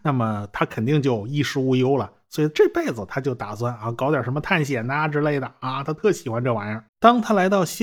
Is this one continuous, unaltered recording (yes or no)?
no